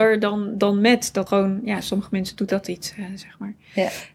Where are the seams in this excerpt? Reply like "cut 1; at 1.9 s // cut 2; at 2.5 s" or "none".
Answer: cut 1; at 1.3 s // cut 2; at 2.5 s